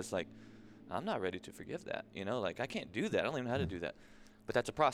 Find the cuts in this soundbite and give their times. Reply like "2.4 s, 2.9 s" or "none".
none

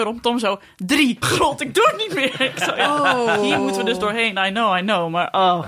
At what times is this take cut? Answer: 1.2 s

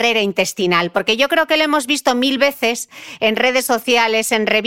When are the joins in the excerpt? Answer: none

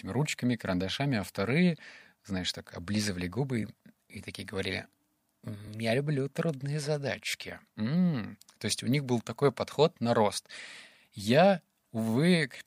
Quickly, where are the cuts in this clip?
none

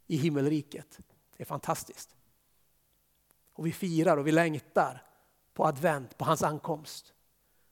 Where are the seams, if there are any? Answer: none

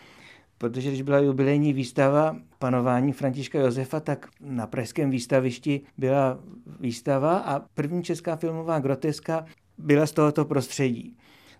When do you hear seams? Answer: 5.9 s, 7.7 s, 9.5 s

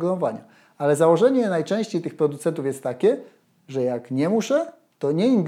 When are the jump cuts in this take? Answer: none

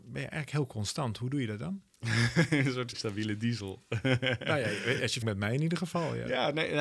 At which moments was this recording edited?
2.9 s, 5.2 s

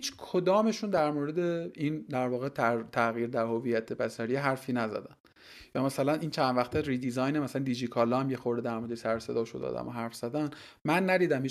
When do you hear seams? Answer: none

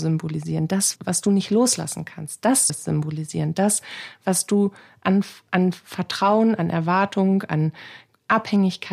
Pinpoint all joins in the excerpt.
1.0 s, 2.7 s

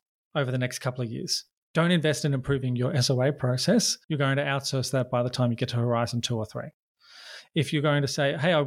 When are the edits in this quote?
1.5 s, 4.0 s

